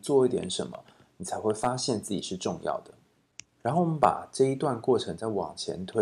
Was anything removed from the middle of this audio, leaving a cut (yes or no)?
no